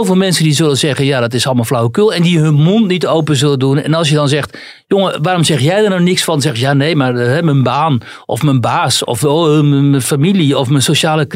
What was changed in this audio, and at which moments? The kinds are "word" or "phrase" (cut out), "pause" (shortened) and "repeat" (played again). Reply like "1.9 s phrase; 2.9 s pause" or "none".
none